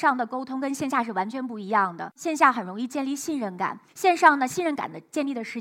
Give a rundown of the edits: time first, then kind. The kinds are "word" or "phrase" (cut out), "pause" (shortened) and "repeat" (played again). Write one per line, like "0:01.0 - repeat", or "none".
0:03.9 - pause